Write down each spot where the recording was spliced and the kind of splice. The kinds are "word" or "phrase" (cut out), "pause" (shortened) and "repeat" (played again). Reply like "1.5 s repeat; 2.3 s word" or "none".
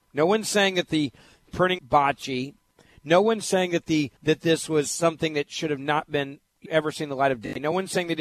1.8 s word; 4.2 s pause; 6.7 s word